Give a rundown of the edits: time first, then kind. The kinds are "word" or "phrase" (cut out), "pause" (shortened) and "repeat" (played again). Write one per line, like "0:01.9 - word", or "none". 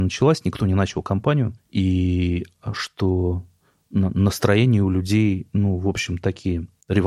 none